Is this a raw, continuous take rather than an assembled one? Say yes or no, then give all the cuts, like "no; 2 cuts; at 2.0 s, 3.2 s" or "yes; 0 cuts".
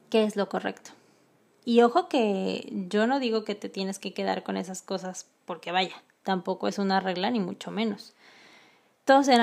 yes; 0 cuts